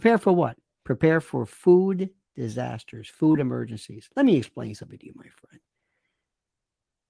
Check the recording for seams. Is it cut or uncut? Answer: uncut